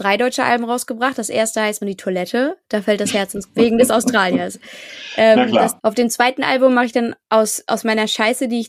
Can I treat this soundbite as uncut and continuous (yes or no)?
no